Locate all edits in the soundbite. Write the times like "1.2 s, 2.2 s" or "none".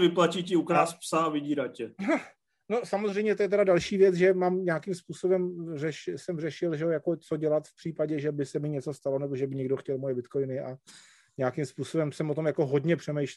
none